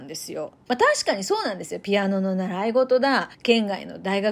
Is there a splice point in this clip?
yes; 1 cut; at 3.3 s

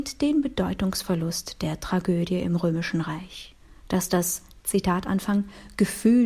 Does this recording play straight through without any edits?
no; 1 cut; at 3.6 s

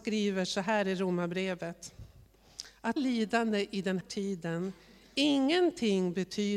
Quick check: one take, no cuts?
no; 2 cuts; at 3.0 s, 4.0 s

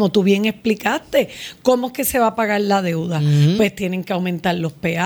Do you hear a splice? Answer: no; 0 cuts

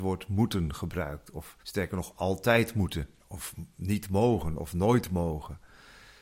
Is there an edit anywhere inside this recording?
yes; 2 cuts; at 1.6 s, 3.2 s

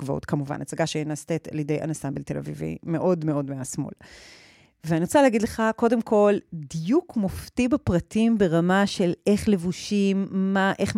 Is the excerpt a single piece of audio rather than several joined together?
yes; 0 cuts

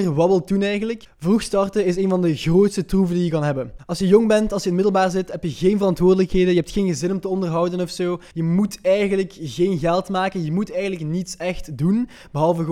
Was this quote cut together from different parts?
no; 0 cuts

